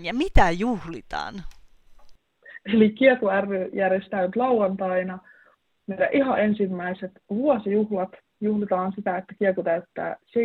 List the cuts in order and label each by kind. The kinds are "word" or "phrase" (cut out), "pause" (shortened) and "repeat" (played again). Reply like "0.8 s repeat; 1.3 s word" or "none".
none